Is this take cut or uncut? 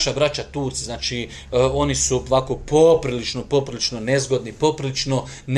uncut